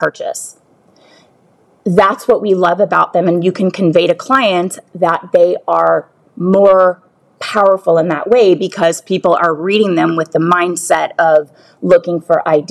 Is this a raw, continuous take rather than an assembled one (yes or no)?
yes